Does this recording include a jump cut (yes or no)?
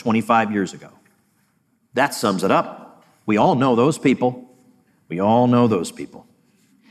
no